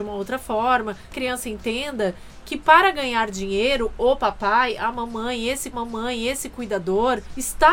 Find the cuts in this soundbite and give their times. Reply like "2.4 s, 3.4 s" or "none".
1.1 s, 5.7 s